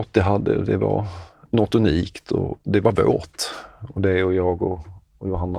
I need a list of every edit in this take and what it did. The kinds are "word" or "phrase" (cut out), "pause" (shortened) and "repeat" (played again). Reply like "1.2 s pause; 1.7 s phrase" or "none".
2.6 s pause